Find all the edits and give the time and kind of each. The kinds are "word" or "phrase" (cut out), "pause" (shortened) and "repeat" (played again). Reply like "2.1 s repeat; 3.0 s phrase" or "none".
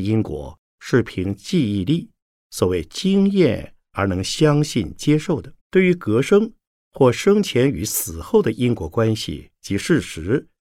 2.2 s pause; 5.6 s pause